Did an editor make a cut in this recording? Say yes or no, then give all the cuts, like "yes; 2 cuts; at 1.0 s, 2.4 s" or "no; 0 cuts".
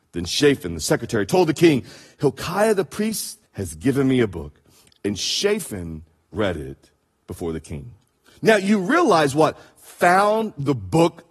yes; 1 cut; at 3.4 s